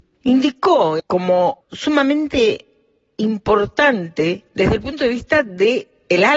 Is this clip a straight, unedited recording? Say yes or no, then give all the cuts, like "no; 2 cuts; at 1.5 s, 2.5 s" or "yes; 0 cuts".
no; 2 cuts; at 1.0 s, 1.6 s